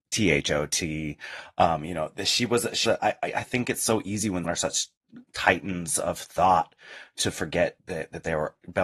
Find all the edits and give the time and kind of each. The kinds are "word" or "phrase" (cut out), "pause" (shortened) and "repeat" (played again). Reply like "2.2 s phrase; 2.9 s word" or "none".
2.9 s word; 4.4 s word; 7.8 s word